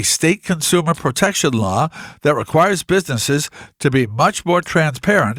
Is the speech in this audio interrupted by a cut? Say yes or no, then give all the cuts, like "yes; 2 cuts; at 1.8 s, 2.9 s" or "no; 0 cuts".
no; 0 cuts